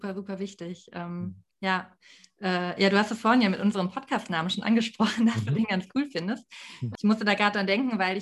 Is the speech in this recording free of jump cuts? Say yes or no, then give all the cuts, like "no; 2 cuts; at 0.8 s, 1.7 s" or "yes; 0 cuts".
no; 1 cut; at 1.5 s